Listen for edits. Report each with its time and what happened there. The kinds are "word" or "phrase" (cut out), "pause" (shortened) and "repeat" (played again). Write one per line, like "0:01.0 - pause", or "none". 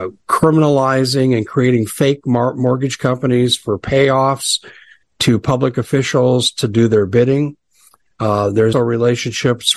0:08.7 - word